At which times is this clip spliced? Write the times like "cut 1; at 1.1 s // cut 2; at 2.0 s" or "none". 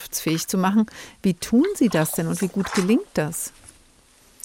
none